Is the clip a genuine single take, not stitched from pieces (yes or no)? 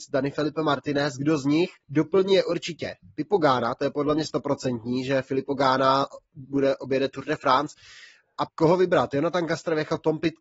no